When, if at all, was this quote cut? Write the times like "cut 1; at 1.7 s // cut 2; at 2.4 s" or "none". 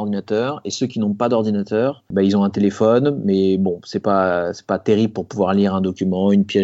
none